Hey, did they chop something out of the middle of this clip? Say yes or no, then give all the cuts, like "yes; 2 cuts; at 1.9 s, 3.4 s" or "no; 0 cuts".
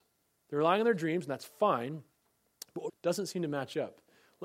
yes; 1 cut; at 2.9 s